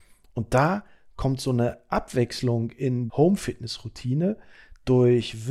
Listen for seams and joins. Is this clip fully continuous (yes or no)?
no